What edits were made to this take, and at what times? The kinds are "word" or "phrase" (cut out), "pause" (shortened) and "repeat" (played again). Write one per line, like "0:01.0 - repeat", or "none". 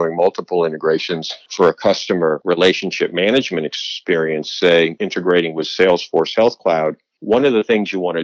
none